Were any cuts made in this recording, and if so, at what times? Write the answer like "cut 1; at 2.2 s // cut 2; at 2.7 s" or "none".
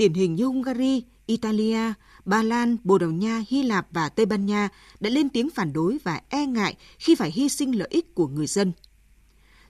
none